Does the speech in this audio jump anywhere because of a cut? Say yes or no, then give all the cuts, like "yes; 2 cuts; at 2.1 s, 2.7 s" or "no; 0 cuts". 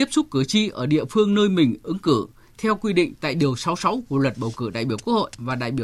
no; 0 cuts